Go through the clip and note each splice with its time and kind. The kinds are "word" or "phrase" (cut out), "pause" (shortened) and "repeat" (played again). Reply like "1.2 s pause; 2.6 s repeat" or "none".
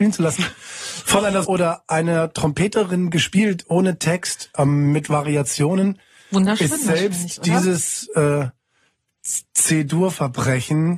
1.4 s word